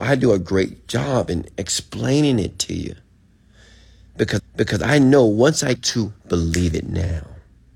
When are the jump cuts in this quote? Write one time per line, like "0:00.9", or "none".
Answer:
0:04.4
0:05.8